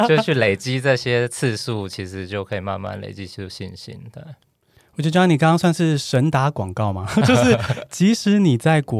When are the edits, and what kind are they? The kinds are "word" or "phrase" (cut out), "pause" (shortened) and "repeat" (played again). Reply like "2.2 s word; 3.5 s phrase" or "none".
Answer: none

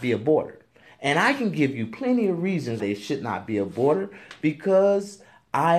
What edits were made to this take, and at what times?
2.8 s word

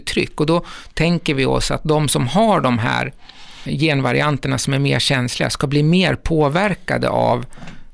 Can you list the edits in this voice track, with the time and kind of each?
none

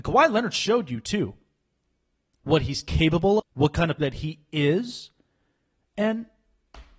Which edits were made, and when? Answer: 3.4 s word; 4.0 s word

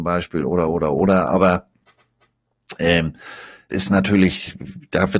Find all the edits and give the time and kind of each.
3.7 s word

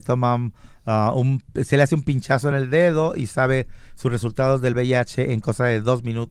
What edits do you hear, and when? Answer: none

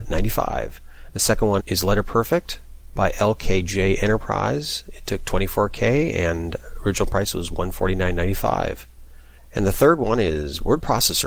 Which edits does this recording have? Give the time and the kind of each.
1.6 s word; 9.4 s pause

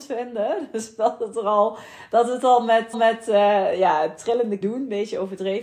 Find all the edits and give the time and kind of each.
2.9 s repeat; 4.6 s word

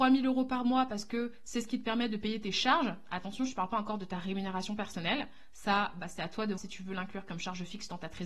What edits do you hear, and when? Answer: 6.6 s word

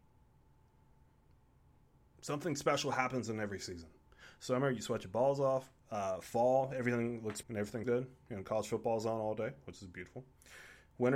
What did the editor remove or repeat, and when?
5.8 s pause; 7.4 s word; 7.8 s word

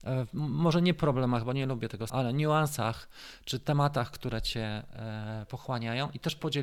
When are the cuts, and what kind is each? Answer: 2.1 s word

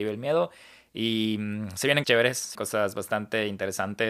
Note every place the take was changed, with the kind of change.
2.0 s word; 2.5 s word

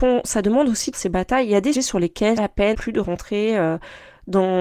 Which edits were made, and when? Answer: 0.9 s word; 1.7 s word; 2.4 s phrase; 2.7 s word

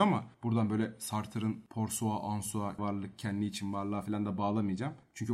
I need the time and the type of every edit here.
2.8 s word

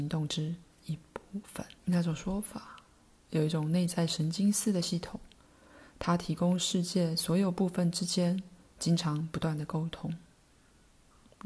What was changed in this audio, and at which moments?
1.8 s pause

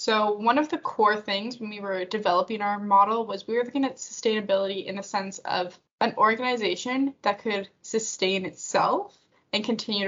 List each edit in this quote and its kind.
5.8 s pause

